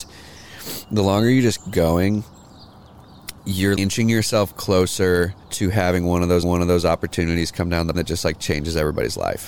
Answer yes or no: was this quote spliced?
yes